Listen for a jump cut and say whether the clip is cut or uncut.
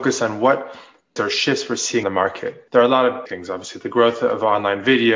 cut